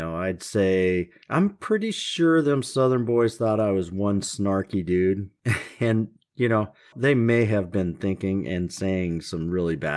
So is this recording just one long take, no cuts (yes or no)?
no